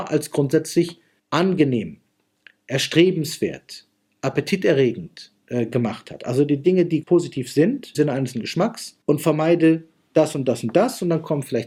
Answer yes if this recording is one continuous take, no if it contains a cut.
no